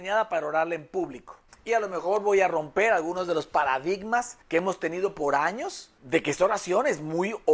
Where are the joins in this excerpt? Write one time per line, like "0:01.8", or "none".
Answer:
0:01.7
0:04.4